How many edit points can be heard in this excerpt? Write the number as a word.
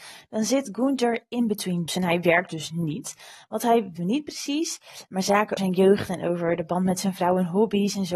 three